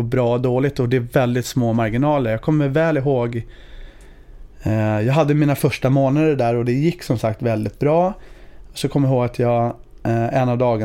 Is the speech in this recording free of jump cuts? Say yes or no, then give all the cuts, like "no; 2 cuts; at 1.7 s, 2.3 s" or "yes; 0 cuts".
yes; 0 cuts